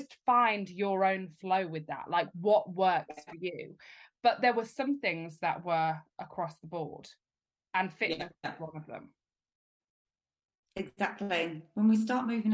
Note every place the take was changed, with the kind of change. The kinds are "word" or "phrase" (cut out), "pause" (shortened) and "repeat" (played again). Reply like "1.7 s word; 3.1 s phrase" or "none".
none